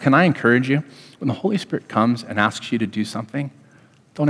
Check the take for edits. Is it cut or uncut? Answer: uncut